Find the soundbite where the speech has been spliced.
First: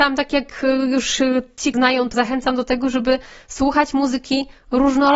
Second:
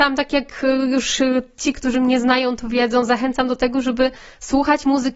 first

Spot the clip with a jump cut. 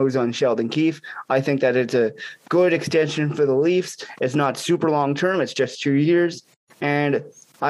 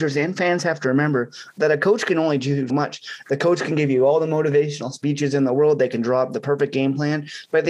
second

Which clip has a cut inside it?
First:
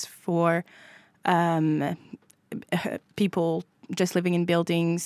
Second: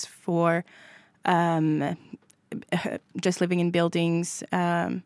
second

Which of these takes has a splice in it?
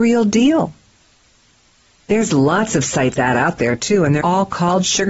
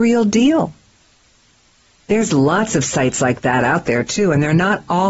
first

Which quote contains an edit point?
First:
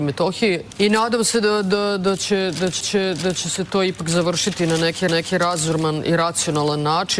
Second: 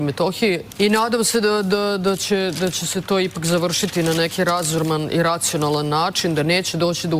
first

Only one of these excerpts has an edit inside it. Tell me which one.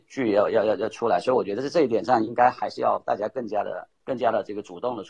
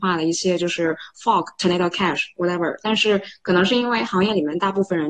first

